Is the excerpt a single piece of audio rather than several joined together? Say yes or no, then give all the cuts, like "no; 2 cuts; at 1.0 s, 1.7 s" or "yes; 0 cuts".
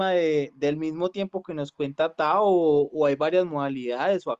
yes; 0 cuts